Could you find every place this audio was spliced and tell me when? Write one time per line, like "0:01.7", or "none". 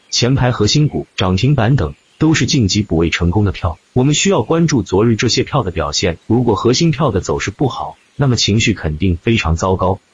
0:01.1
0:03.9
0:06.2